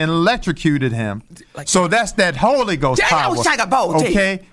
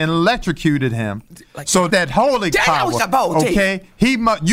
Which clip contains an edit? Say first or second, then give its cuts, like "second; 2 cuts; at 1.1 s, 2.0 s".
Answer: second; 3 cuts; at 1.9 s, 2.5 s, 3.0 s